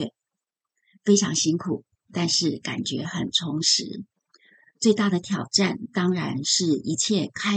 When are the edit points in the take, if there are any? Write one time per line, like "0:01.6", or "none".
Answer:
none